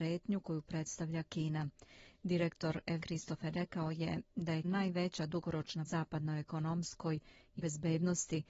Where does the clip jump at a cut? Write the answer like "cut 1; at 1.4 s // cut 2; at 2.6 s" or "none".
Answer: cut 1; at 3.0 s // cut 2; at 3.5 s // cut 3; at 4.6 s // cut 4; at 5.9 s // cut 5; at 7.6 s